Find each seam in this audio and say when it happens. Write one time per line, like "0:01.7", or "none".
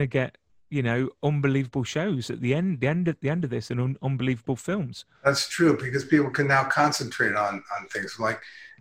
0:05.1